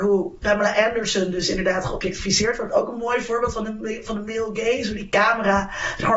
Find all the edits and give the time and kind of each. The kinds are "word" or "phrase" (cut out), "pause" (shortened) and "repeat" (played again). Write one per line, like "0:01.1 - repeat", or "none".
none